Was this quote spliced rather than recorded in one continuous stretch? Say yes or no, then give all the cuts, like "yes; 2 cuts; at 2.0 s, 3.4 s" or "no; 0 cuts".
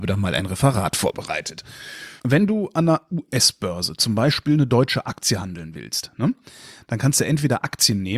no; 0 cuts